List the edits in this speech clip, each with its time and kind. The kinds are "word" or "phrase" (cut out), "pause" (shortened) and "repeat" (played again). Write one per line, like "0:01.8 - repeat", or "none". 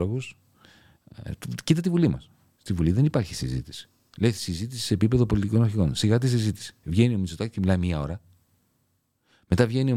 none